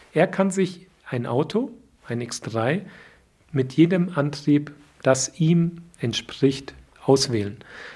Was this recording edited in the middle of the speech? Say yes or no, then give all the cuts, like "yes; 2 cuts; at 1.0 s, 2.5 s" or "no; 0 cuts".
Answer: no; 0 cuts